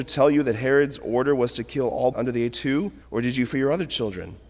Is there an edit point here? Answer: yes; 4 cuts; at 2.1 s, 2.5 s, 3.0 s, 3.5 s

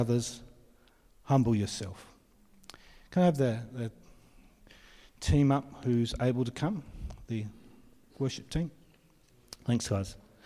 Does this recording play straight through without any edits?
yes; 0 cuts

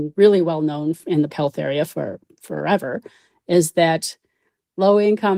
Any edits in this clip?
yes; 1 cut; at 1.3 s

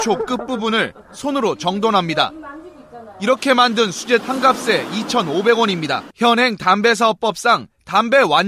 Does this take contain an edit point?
yes; 2 cuts; at 4.2 s, 6.1 s

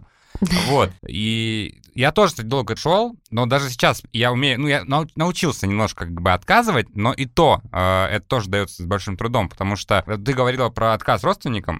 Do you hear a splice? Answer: yes; 2 cuts; at 1.0 s, 2.8 s

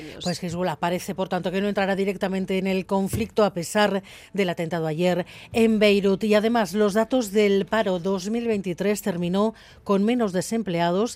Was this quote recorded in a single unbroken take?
yes; 0 cuts

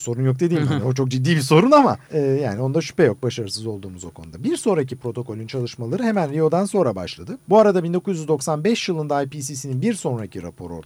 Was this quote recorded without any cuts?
no; 2 cuts; at 2.1 s, 7.4 s

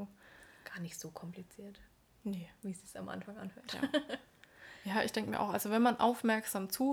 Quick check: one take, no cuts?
yes; 0 cuts

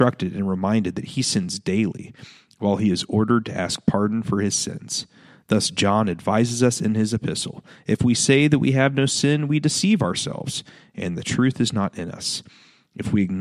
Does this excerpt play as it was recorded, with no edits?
yes; 0 cuts

